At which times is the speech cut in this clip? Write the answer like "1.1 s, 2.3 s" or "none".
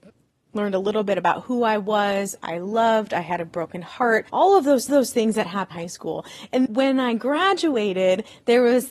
4.3 s, 4.9 s, 5.7 s, 6.7 s